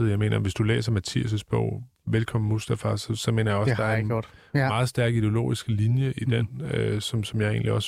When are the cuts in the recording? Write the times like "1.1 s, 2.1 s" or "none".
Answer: none